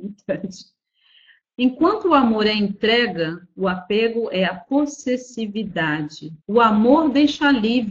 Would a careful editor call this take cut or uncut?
cut